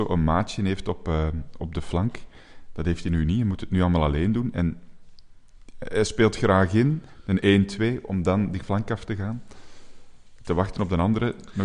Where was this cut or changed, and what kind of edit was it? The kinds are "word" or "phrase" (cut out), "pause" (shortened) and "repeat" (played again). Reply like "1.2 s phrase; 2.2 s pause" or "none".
none